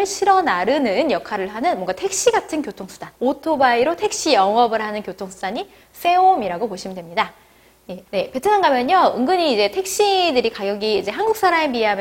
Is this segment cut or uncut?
cut